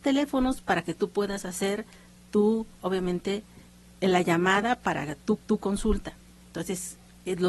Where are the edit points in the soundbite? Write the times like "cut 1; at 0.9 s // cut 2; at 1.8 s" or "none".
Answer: cut 1; at 2.8 s // cut 2; at 5.4 s